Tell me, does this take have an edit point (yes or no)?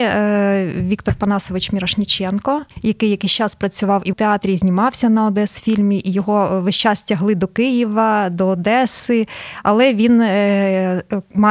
yes